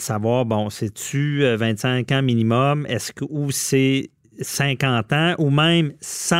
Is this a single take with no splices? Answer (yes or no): yes